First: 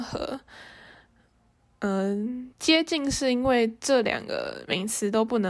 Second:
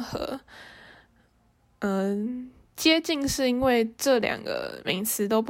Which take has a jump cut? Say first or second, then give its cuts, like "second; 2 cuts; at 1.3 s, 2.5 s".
first; 1 cut; at 2.5 s